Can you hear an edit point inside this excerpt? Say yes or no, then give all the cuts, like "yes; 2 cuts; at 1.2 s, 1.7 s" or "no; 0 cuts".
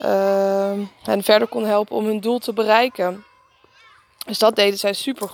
no; 0 cuts